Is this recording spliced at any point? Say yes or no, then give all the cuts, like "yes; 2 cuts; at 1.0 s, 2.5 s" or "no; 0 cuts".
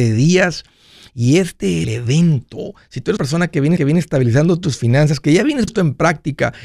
yes; 4 cuts; at 1.8 s, 3.2 s, 3.8 s, 5.7 s